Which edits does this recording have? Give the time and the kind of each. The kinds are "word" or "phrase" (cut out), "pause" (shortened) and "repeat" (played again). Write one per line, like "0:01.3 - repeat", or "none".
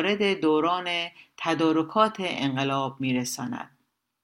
none